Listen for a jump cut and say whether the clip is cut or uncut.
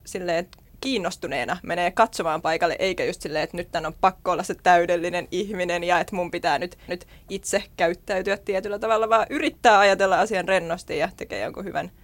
cut